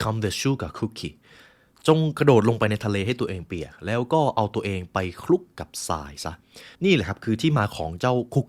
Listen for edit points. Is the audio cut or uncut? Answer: cut